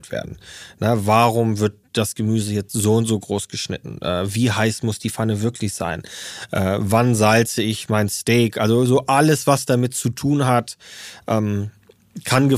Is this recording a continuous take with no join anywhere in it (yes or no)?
yes